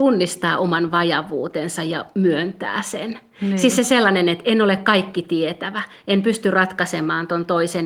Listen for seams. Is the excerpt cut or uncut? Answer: uncut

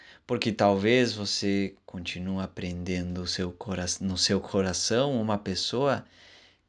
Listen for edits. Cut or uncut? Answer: uncut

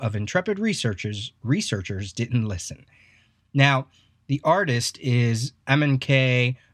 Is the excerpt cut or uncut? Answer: uncut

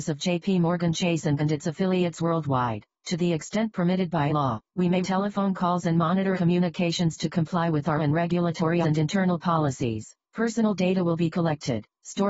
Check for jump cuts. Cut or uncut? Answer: cut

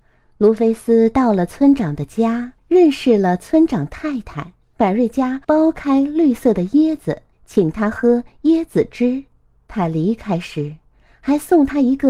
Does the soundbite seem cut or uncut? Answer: cut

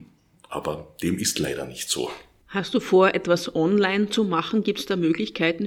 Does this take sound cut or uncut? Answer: uncut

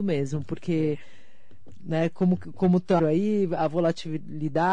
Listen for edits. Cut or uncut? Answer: cut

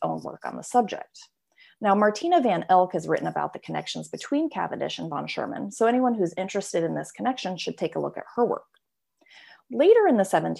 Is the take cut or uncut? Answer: uncut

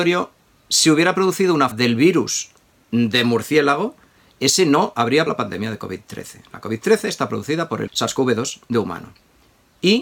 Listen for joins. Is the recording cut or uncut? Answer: cut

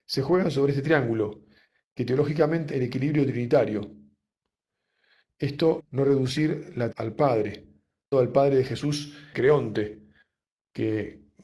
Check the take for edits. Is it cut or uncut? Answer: cut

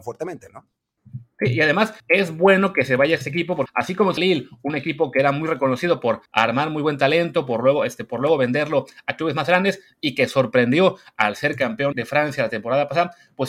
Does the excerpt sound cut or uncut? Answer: cut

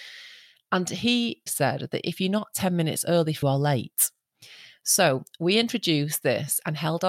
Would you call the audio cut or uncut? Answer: cut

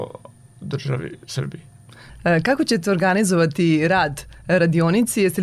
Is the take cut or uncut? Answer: uncut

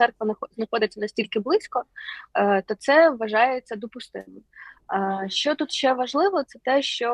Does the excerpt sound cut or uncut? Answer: uncut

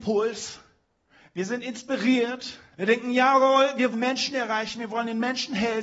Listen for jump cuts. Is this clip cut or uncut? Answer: cut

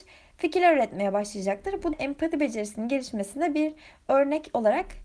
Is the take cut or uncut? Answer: cut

